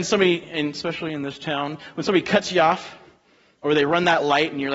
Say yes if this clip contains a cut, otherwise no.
no